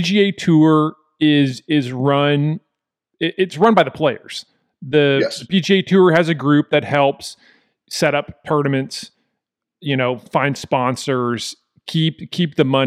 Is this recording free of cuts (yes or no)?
yes